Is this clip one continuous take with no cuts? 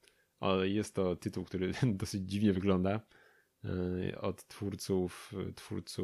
yes; 0 cuts

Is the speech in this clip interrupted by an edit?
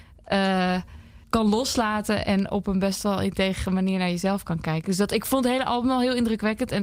yes; 2 cuts; at 1.2 s, 2.2 s

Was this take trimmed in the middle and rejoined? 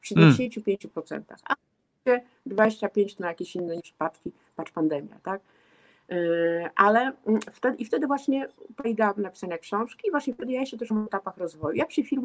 yes; 4 cuts; at 3.2 s, 3.8 s, 8.8 s, 10.9 s

